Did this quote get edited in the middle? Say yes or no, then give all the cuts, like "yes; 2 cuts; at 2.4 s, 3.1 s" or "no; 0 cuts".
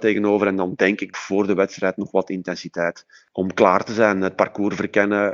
yes; 1 cut; at 1.1 s